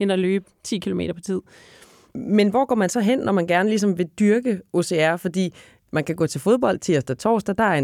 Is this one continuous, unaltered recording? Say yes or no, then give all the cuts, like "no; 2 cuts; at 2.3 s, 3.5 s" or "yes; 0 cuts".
yes; 0 cuts